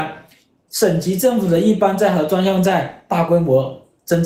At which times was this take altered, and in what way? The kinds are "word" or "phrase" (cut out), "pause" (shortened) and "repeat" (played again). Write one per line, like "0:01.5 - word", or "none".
none

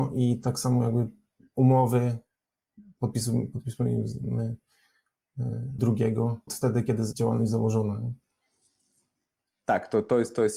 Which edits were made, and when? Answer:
0:05.8 - word
0:06.5 - word
0:07.1 - word

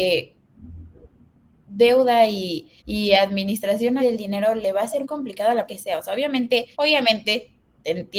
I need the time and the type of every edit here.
0:02.8 - pause
0:04.0 - word
0:05.0 - word
0:05.7 - word
0:06.7 - pause

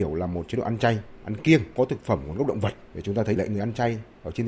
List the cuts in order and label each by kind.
0:01.8 - word
0:03.4 - word

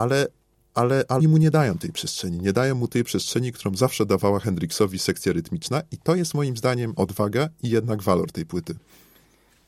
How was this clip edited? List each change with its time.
0:01.2 - word
0:07.0 - word

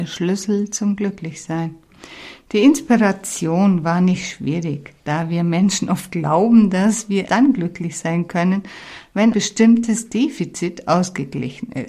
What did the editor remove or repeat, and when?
0:07.3 - word
0:09.3 - word

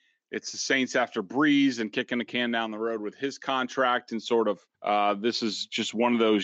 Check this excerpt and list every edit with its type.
0:04.7 - pause

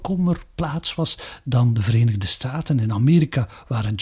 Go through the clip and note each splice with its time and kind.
none

